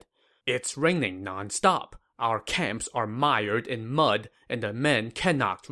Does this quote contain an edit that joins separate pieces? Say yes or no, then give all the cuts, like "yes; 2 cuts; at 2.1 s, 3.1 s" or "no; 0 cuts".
no; 0 cuts